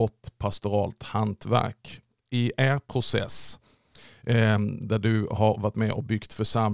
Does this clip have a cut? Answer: no; 0 cuts

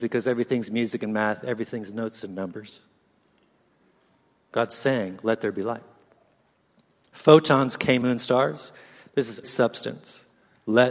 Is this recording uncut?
no; 2 cuts; at 8.0 s, 9.4 s

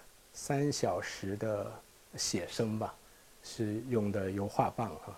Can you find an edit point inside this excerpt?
no; 0 cuts

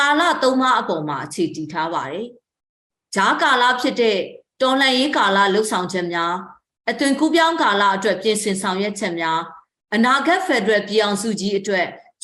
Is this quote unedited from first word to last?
yes; 0 cuts

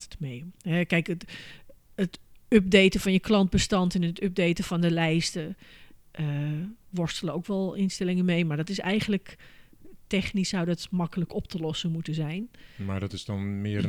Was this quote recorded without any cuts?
yes; 0 cuts

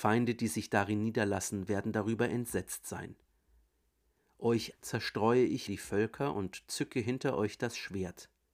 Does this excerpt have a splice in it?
yes; 2 cuts; at 4.7 s, 5.7 s

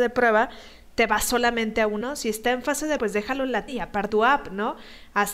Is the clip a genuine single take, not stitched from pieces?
no; 4 cuts; at 2.0 s, 3.0 s, 3.7 s, 4.1 s

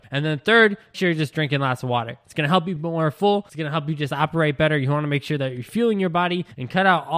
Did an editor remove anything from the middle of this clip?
yes; 2 cuts; at 0.9 s, 2.8 s

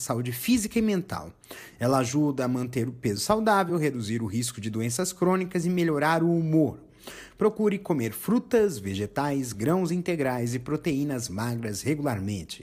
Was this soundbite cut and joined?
no; 0 cuts

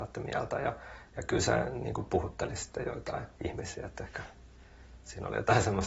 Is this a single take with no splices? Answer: no; 1 cut; at 3.3 s

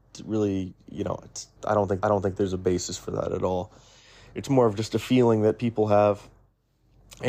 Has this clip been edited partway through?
yes; 2 cuts; at 1.6 s, 2.0 s

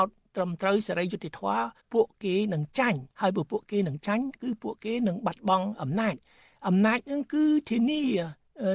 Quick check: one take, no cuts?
no; 2 cuts; at 1.8 s, 3.1 s

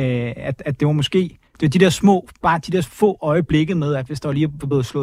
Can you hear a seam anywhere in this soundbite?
yes; 1 cut; at 1.5 s

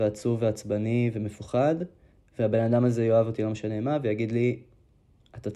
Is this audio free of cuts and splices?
yes; 0 cuts

